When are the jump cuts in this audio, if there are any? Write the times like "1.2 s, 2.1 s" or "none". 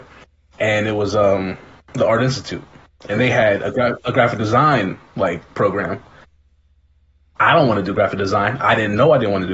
none